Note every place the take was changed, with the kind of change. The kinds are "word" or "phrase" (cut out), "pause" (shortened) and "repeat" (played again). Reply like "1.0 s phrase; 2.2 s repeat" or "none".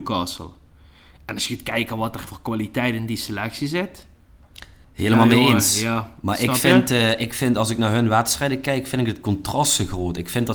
4.8 s pause

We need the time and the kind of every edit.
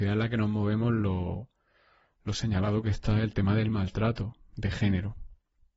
none

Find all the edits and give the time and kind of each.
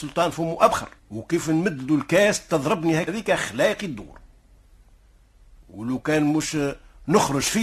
1.0 s pause; 3.1 s word; 5.6 s pause

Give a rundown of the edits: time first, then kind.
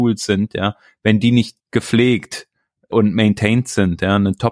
1.6 s word

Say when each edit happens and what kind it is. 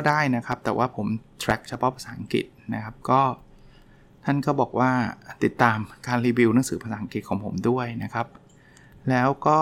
none

